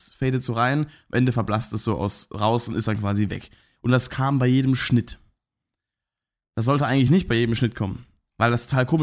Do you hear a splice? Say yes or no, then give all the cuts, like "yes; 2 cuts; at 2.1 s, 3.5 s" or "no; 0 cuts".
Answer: no; 0 cuts